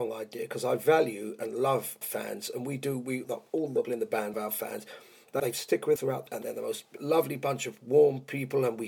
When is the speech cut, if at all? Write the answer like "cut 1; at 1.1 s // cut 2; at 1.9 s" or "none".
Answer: cut 1; at 2.0 s // cut 2; at 3.2 s // cut 3; at 3.8 s // cut 4; at 4.3 s // cut 5; at 5.4 s // cut 6; at 6.0 s // cut 7; at 6.3 s // cut 8; at 7.0 s